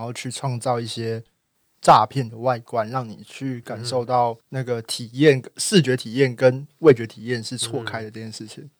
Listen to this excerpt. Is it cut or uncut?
cut